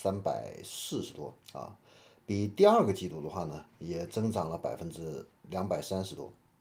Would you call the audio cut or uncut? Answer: cut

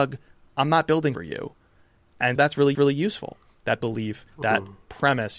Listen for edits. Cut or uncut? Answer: cut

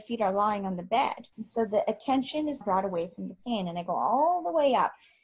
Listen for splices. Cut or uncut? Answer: cut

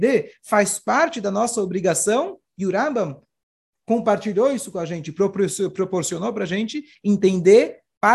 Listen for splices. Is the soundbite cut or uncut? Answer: uncut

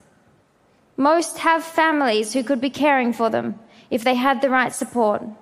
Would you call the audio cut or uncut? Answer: uncut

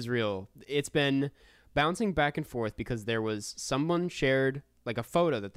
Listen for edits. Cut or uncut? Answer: uncut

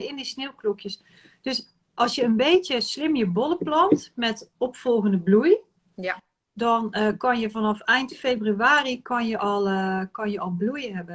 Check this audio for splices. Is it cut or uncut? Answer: uncut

